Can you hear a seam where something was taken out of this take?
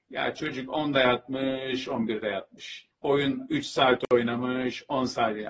yes; 1 cut; at 2.9 s

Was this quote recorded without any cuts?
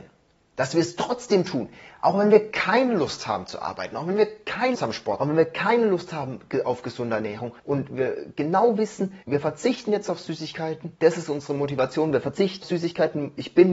no; 6 cuts; at 4.7 s, 5.2 s, 7.6 s, 9.2 s, 10.9 s, 12.6 s

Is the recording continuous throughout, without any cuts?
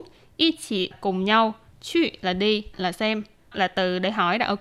no; 3 cuts; at 0.9 s, 2.7 s, 3.5 s

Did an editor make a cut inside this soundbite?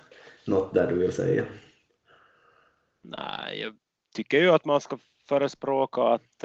no; 0 cuts

